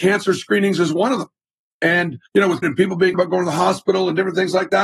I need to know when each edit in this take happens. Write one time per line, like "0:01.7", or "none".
0:02.3
0:02.6
0:03.1